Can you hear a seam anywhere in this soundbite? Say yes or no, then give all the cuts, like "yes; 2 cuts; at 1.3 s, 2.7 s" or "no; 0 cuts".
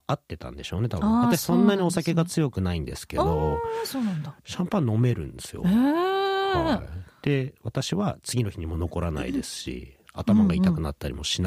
yes; 1 cut; at 4.4 s